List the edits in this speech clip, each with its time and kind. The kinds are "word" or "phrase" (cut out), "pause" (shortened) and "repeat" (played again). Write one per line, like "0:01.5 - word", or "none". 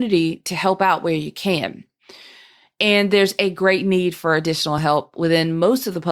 none